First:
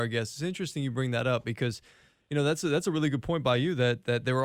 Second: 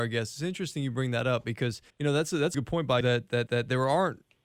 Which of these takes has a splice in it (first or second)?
second